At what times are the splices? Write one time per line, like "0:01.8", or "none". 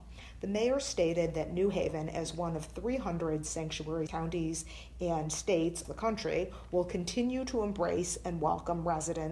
0:04.1
0:05.8